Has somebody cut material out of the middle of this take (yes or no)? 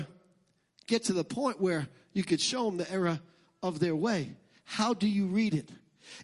no